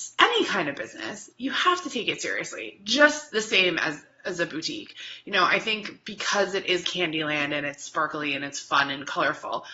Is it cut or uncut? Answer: cut